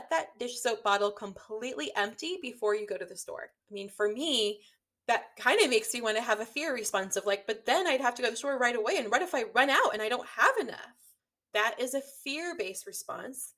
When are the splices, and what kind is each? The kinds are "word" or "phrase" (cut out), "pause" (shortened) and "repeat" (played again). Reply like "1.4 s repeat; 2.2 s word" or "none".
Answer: 3.6 s pause; 11.2 s pause